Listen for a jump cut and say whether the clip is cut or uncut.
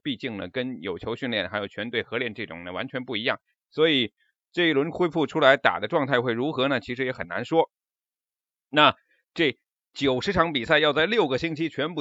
uncut